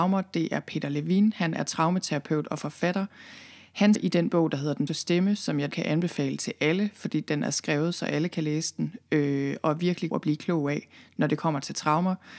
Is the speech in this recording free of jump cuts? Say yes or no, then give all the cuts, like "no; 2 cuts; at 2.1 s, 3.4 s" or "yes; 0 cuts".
no; 4 cuts; at 4.0 s, 4.9 s, 5.7 s, 10.1 s